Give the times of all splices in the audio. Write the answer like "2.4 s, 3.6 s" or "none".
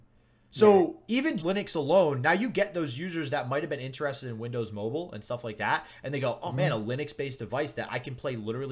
1.4 s